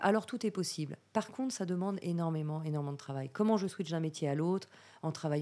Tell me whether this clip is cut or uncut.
uncut